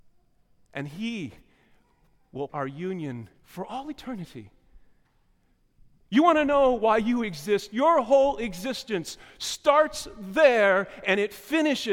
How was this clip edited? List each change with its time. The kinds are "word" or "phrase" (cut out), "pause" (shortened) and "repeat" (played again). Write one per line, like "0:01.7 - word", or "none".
0:02.5 - word
0:03.4 - pause